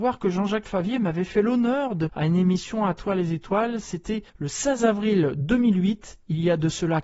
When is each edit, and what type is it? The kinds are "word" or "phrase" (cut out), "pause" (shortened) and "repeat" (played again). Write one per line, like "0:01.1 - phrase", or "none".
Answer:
0:02.1 - word
0:04.3 - pause

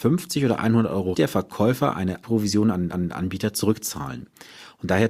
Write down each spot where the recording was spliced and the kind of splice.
0:01.1 - phrase
0:02.2 - word
0:02.9 - repeat

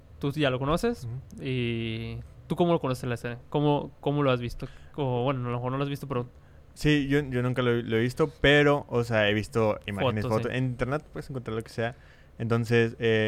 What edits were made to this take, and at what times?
none

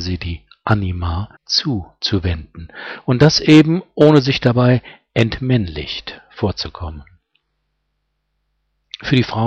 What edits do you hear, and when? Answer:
0:01.4 - pause

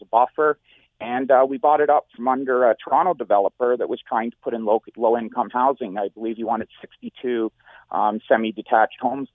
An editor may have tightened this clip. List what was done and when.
none

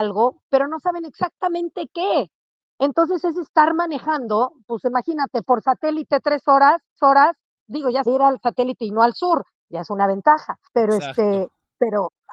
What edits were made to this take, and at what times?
0:07.0 - repeat
0:08.1 - phrase
0:10.7 - pause

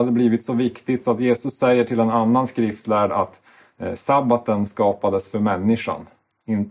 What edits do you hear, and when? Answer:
none

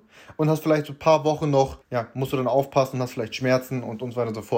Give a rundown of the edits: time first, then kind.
0:01.8 - pause

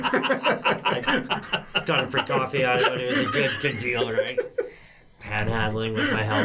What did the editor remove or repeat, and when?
none

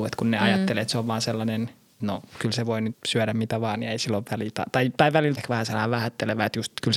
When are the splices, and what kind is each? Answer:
0:02.0 - word
0:02.9 - word
0:05.4 - word

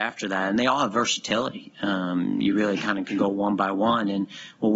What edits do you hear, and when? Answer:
none

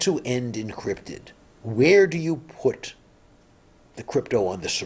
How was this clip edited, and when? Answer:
none

